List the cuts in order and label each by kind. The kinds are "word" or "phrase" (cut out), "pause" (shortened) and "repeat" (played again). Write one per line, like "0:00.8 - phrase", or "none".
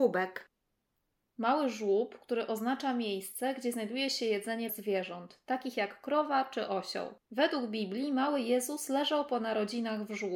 0:04.7 - word
0:07.2 - pause